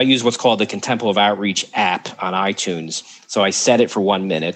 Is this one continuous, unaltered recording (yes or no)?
yes